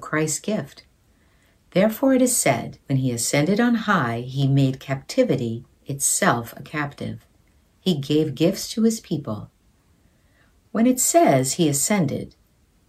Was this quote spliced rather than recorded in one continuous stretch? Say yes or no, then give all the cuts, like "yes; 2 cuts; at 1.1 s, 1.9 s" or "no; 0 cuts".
yes; 1 cut; at 2.8 s